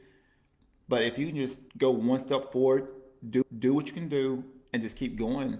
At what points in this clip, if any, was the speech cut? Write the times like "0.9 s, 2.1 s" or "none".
1.7 s, 3.4 s